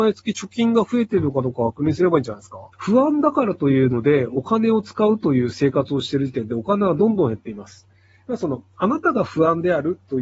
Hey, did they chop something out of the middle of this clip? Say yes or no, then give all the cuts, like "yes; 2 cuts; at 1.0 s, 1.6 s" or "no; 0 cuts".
yes; 1 cut; at 2.7 s